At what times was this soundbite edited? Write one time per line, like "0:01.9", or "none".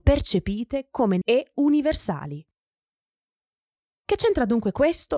0:01.2